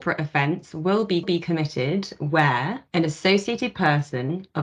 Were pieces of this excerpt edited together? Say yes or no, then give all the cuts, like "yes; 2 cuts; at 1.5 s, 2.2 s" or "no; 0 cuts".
yes; 2 cuts; at 1.2 s, 2.9 s